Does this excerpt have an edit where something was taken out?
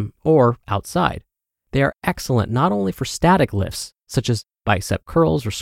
no; 0 cuts

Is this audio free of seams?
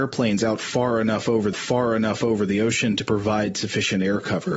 no; 1 cut; at 1.5 s

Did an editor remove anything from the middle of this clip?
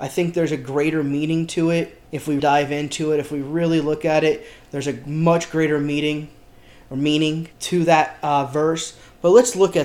yes; 3 cuts; at 2.0 s, 2.4 s, 7.5 s

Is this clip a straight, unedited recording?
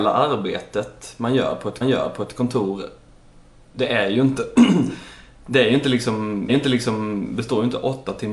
no; 2 cuts; at 1.8 s, 6.5 s

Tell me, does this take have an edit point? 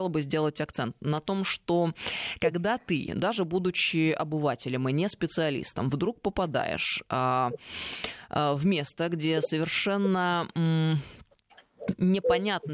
no; 0 cuts

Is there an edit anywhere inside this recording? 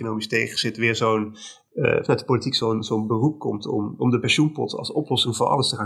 no; 0 cuts

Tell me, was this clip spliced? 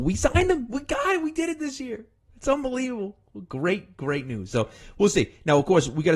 no; 0 cuts

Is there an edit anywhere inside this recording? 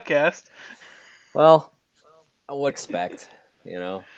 yes; 1 cut; at 2.7 s

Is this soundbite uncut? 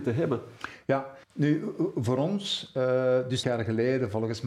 no; 2 cuts; at 1.2 s, 3.4 s

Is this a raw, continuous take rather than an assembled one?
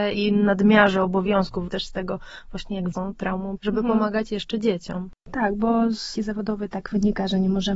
no; 5 cuts; at 1.7 s, 2.9 s, 3.6 s, 5.2 s, 6.1 s

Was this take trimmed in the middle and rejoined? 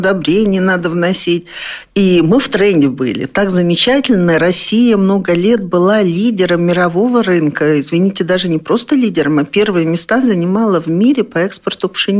no; 0 cuts

